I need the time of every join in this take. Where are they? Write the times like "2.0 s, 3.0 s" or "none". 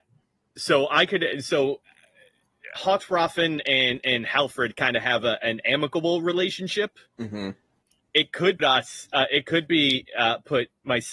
2.8 s, 8.6 s